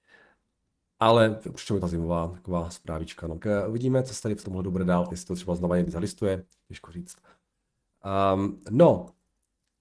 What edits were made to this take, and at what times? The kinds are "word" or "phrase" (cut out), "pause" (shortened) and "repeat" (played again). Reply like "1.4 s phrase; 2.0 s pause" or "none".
1.8 s phrase; 3.4 s word; 4.4 s word; 5.1 s word